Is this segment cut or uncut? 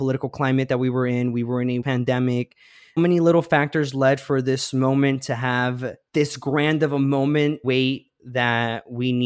cut